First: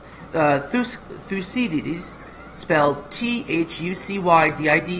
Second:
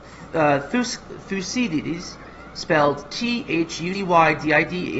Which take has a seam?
second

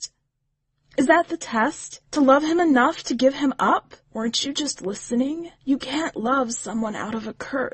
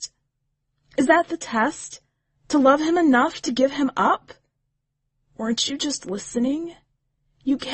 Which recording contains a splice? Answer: first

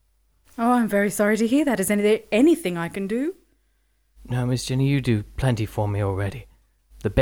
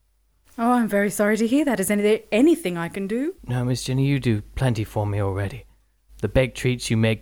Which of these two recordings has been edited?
second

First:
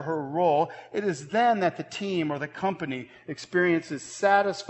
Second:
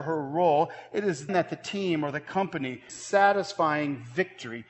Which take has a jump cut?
second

